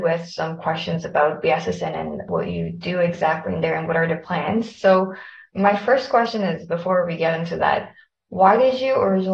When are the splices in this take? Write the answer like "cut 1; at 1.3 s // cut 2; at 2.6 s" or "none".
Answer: none